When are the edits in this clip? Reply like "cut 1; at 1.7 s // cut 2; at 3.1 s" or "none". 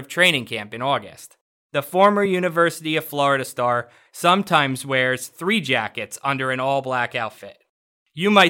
none